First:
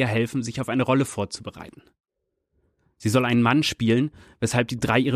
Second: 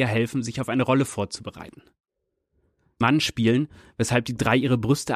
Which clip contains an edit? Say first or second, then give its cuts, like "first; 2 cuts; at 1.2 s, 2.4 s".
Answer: second; 1 cut; at 3.0 s